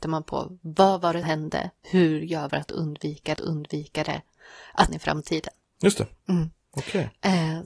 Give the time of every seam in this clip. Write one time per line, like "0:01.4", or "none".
0:01.2
0:01.8
0:02.5
0:03.4
0:04.9